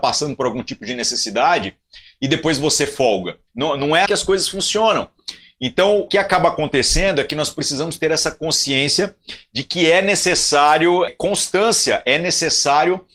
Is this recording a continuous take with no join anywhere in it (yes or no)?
no